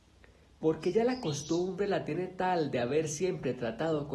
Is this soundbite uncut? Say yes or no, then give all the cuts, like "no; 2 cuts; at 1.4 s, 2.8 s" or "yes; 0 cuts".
yes; 0 cuts